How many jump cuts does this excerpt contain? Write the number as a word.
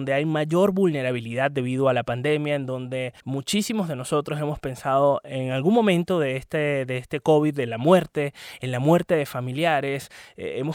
one